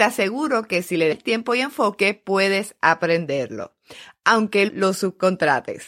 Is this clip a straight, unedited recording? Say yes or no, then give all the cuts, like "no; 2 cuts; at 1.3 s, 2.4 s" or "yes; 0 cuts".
no; 2 cuts; at 1.1 s, 4.7 s